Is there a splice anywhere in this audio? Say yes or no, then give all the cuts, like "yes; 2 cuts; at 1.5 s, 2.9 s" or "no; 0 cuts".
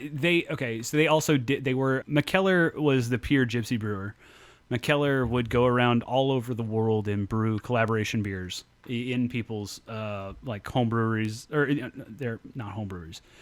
yes; 1 cut; at 2.0 s